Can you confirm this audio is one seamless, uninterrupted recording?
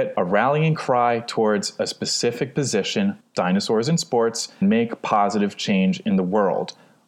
no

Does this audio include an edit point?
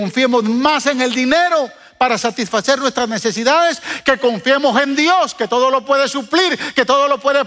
no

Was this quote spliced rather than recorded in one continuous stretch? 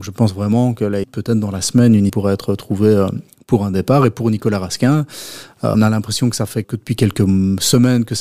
yes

